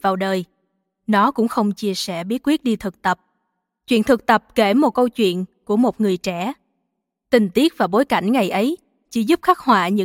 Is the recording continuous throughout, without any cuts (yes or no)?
yes